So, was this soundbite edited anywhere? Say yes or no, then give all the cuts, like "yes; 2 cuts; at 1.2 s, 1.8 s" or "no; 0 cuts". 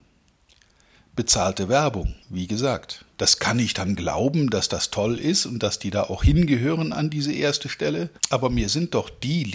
yes; 3 cuts; at 2.2 s, 3.1 s, 8.2 s